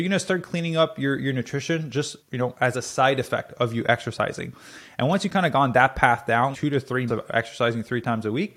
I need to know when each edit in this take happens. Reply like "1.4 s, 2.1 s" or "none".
2.2 s, 2.7 s, 6.5 s, 7.1 s